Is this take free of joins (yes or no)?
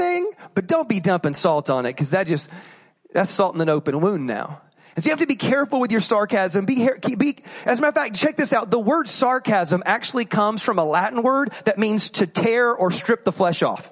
yes